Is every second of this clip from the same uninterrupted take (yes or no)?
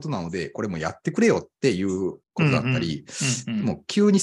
no